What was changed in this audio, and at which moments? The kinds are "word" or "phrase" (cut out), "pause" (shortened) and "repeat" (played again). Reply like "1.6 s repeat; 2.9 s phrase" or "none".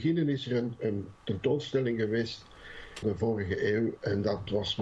1.2 s pause; 3.0 s phrase